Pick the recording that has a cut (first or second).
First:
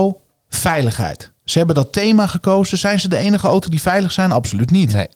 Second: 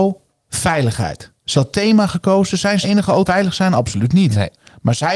second